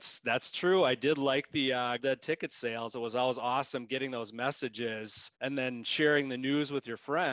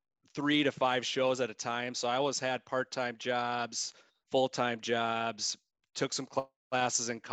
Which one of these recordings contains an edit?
first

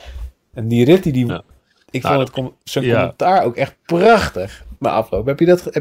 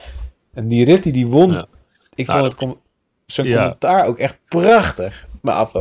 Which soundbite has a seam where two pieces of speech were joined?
first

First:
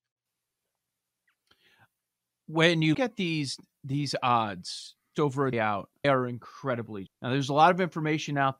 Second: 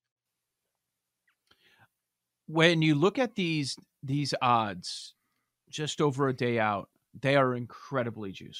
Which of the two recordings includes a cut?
first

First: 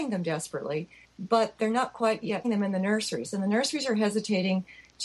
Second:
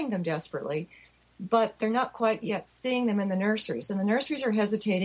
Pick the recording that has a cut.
first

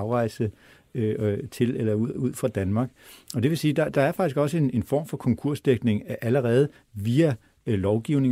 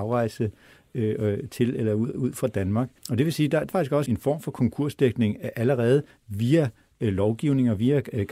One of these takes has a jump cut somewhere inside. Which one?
second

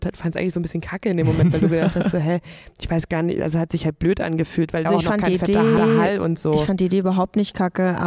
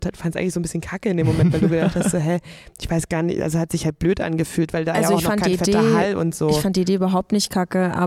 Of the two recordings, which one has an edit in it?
first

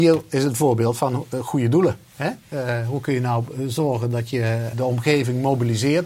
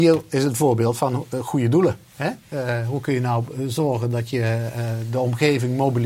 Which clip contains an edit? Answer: first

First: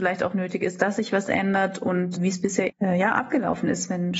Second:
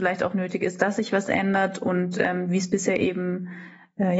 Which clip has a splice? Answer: first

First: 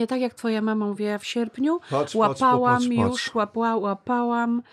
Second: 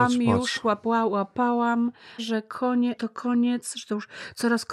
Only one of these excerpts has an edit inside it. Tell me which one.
second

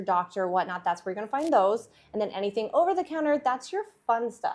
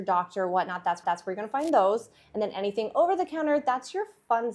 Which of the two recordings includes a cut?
second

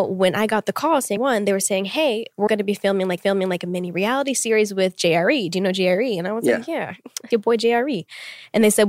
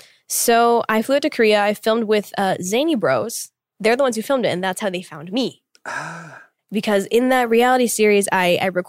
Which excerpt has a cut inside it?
first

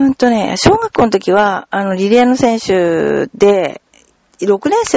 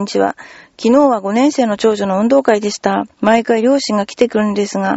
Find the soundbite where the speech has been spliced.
second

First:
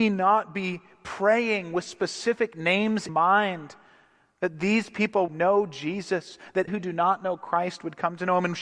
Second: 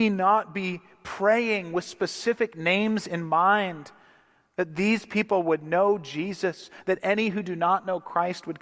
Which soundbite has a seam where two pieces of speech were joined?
first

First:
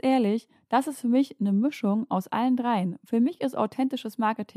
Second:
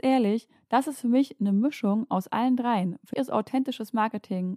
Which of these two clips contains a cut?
second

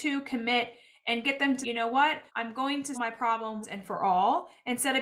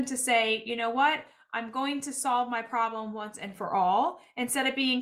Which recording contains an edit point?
first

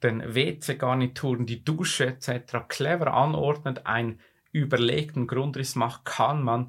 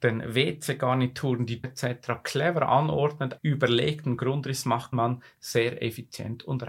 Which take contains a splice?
second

